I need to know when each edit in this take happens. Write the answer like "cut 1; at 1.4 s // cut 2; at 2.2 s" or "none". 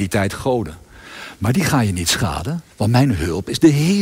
cut 1; at 2.7 s